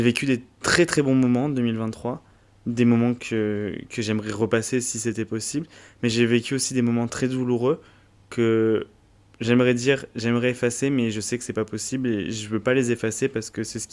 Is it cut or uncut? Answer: uncut